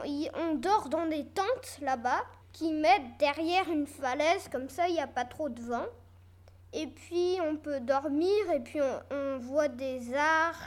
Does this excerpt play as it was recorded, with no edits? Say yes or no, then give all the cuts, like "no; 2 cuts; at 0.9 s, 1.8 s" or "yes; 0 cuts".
no; 1 cut; at 2.4 s